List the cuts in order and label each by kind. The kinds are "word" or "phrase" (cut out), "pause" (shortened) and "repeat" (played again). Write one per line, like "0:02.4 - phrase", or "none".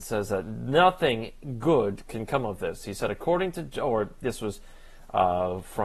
none